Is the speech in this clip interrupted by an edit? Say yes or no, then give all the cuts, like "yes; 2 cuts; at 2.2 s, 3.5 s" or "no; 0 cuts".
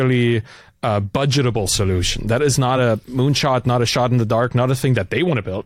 no; 0 cuts